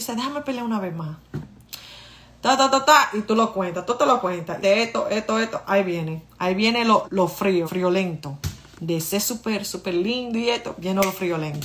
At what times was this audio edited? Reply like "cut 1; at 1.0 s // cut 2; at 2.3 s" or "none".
cut 1; at 4.6 s // cut 2; at 7.0 s // cut 3; at 7.6 s